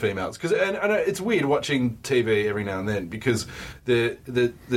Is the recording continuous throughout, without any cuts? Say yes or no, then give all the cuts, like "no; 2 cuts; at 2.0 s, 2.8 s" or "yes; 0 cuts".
yes; 0 cuts